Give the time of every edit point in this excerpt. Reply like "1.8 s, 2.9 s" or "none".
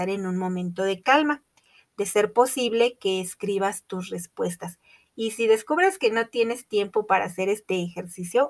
none